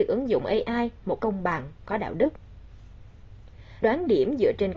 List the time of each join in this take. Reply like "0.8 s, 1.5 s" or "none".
1.2 s, 1.9 s, 3.8 s